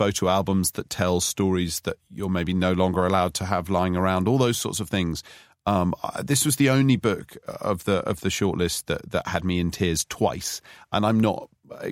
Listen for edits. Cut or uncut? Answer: uncut